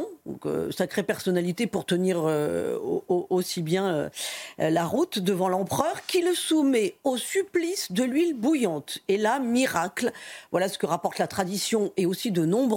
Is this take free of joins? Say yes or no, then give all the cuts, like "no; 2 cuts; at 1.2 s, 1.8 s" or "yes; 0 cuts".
yes; 0 cuts